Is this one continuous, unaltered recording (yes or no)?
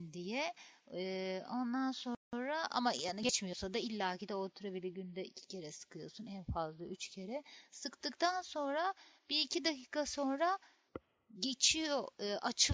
yes